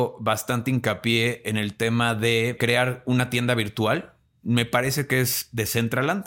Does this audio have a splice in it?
no; 0 cuts

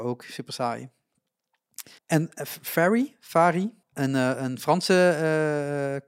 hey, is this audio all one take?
no; 2 cuts; at 2.0 s, 3.8 s

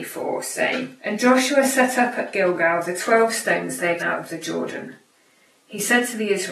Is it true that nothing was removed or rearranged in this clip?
no; 2 cuts; at 1.0 s, 4.0 s

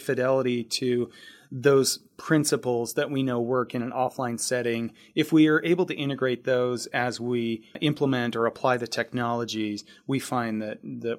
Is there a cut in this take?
no; 0 cuts

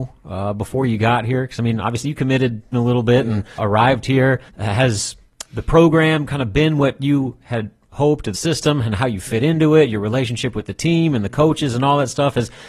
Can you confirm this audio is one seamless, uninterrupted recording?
no; 4 cuts; at 2.7 s, 3.6 s, 4.5 s, 8.3 s

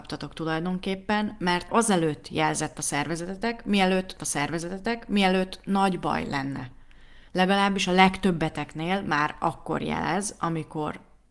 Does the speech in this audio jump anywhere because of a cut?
yes; 3 cuts; at 1.7 s, 4.2 s, 7.3 s

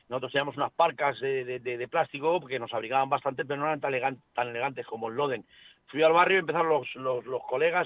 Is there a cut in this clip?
no; 0 cuts

